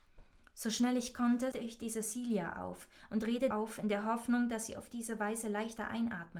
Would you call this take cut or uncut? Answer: cut